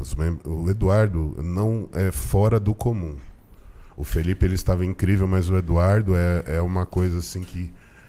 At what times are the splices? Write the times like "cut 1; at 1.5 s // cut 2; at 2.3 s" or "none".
none